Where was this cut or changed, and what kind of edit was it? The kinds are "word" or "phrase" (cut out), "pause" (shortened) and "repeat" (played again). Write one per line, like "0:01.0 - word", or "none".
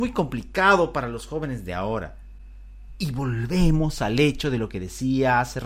none